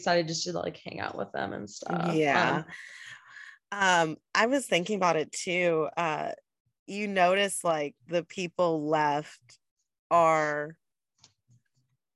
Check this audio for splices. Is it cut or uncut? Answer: uncut